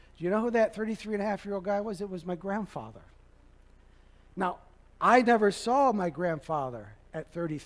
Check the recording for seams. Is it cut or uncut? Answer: uncut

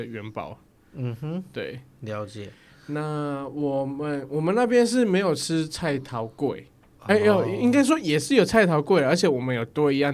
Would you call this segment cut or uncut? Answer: uncut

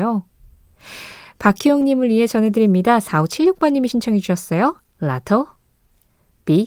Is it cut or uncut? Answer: uncut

